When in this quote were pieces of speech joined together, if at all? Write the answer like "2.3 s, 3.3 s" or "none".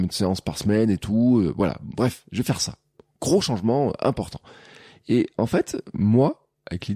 none

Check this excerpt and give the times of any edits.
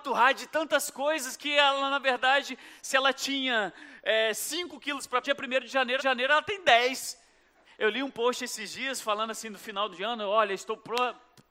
5.2 s, 6.0 s, 7.6 s

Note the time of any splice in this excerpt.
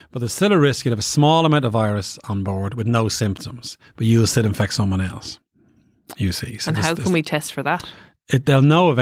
none

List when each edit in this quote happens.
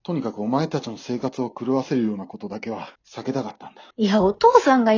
3.0 s, 3.9 s

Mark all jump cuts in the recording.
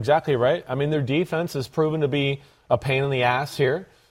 none

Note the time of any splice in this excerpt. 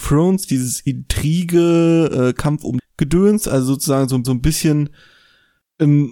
2.8 s, 4.2 s

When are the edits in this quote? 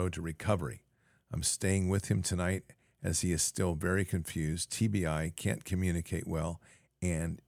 none

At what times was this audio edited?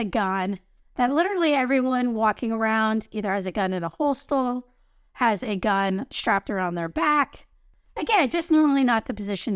none

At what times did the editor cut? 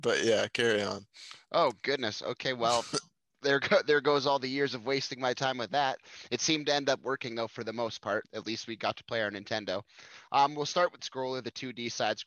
8.2 s, 11.0 s

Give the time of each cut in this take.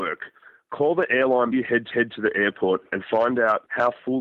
1.5 s, 1.9 s

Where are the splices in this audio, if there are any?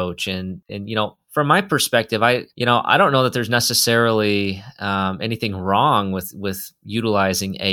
1.2 s, 2.5 s

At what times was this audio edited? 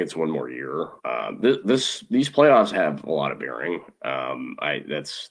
1.0 s

